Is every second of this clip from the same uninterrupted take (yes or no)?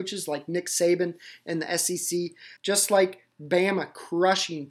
no